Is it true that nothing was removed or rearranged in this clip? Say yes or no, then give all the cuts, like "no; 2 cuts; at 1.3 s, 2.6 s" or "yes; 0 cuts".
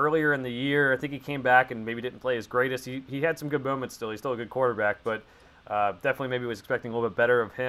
yes; 0 cuts